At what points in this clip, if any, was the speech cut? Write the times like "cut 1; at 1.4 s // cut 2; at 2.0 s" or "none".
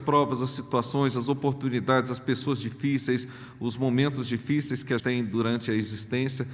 cut 1; at 5.0 s